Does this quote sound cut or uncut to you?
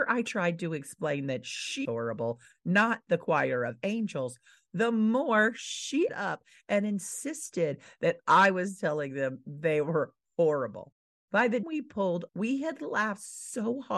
cut